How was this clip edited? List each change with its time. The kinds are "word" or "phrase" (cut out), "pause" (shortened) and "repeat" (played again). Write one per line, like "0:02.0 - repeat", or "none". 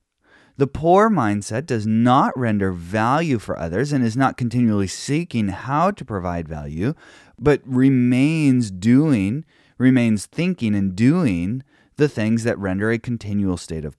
none